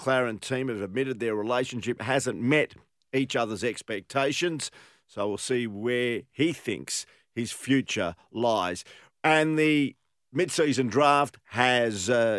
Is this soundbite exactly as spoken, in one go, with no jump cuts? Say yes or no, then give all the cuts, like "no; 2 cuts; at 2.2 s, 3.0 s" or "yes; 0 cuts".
yes; 0 cuts